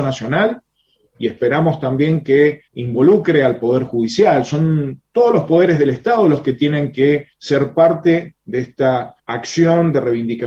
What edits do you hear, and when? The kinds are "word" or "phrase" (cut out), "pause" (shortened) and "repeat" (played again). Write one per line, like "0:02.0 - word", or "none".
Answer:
0:02.7 - pause
0:07.3 - pause
0:09.2 - pause